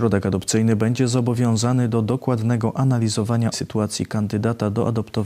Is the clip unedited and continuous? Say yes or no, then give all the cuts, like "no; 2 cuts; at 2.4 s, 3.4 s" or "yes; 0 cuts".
no; 1 cut; at 3.5 s